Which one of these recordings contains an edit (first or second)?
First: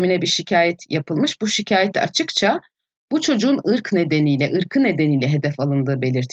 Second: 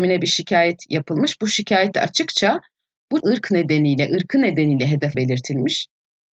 second